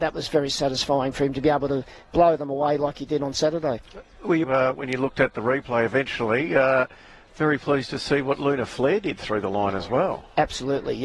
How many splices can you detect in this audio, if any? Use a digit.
1